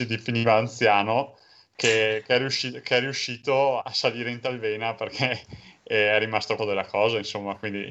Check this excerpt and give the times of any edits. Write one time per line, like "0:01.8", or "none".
0:03.8
0:06.6